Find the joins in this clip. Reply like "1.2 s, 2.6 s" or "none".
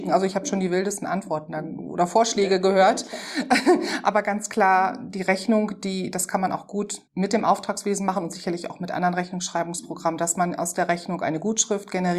7.1 s